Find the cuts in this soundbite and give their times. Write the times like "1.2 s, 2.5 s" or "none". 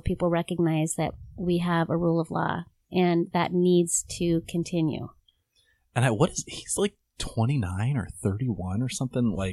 none